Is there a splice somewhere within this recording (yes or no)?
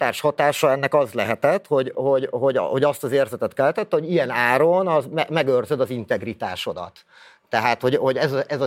no